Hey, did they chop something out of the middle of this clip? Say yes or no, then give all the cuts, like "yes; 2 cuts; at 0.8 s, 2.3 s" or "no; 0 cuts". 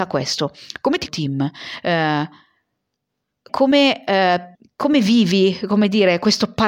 yes; 3 cuts; at 1.1 s, 3.5 s, 4.5 s